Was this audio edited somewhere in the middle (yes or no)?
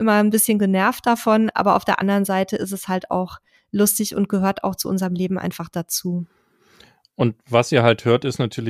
no